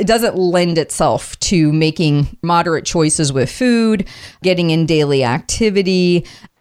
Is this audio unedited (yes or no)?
yes